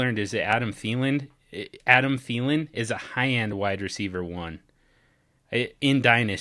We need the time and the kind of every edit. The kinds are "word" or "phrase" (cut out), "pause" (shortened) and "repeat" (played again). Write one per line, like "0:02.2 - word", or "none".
none